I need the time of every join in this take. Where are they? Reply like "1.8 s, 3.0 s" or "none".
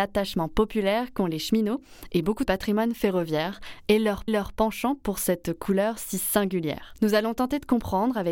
2.4 s, 4.3 s